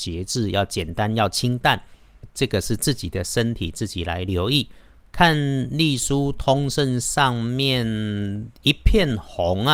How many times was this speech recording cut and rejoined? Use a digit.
0